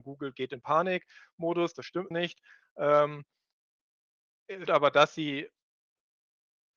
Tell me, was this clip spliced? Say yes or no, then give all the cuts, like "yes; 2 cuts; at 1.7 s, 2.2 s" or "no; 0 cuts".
yes; 2 cuts; at 2.1 s, 4.7 s